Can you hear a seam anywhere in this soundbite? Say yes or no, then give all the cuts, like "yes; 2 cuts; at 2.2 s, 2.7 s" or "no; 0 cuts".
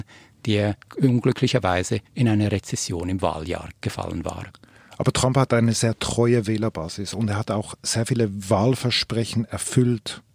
yes; 1 cut; at 2.1 s